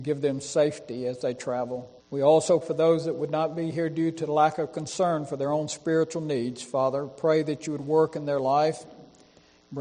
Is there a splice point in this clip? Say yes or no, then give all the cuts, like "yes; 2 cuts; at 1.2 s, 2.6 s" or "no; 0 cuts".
yes; 2 cuts; at 2.0 s, 2.6 s